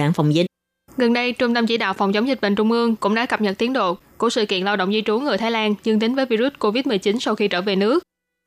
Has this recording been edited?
no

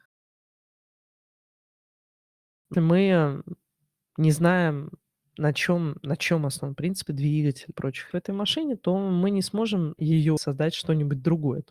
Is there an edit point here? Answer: yes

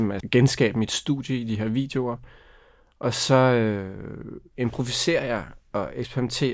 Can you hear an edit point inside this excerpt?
no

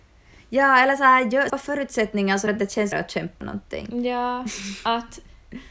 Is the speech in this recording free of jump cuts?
no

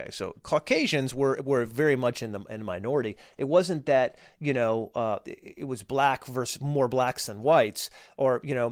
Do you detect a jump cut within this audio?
no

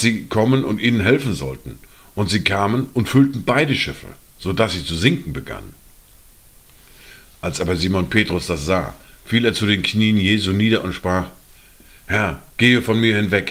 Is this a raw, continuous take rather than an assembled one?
yes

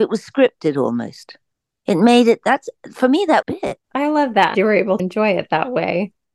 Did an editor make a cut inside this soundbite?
yes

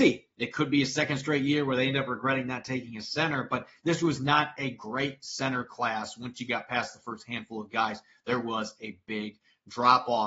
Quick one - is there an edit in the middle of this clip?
no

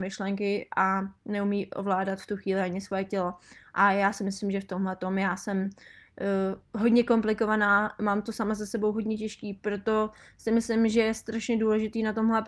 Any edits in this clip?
no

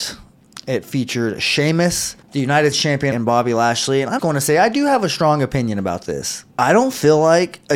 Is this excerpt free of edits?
no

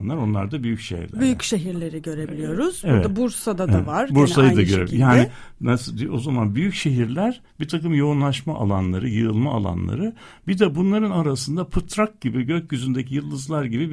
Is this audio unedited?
yes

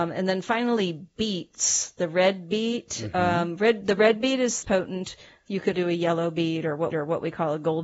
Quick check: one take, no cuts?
no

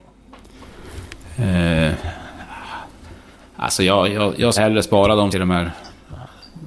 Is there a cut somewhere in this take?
yes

